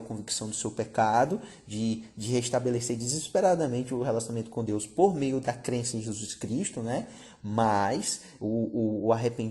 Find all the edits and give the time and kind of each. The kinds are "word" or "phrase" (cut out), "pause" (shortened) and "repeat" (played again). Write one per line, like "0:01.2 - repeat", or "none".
none